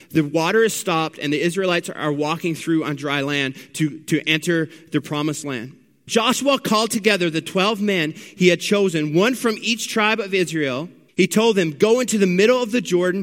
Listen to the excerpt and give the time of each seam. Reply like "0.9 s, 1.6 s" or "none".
6.1 s, 11.1 s